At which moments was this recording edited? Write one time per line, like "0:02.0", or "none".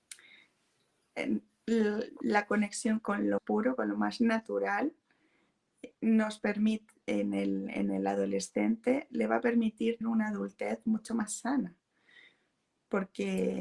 0:03.0
0:03.4
0:10.0

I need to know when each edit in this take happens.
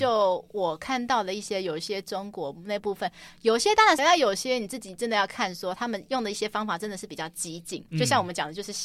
0:04.0
0:07.9

